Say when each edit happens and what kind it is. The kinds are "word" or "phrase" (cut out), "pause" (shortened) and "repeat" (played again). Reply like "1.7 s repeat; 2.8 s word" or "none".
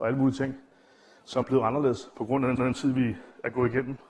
1.4 s word; 2.6 s repeat